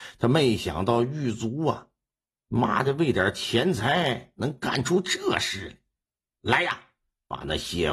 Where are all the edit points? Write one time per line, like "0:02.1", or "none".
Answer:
none